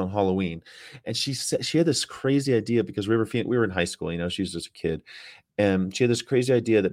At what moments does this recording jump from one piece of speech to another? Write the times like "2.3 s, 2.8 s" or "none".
none